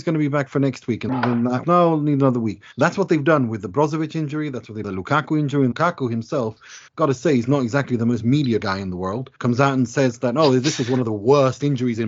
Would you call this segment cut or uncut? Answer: cut